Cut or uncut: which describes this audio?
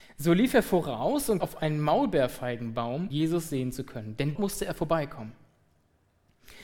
cut